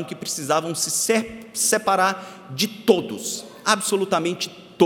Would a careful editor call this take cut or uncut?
uncut